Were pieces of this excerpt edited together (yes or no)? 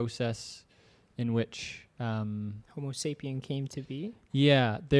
no